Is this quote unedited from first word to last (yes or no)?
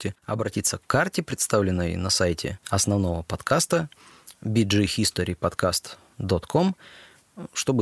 yes